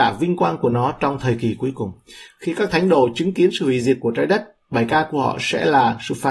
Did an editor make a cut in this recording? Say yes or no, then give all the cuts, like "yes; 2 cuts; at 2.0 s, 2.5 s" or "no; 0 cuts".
no; 0 cuts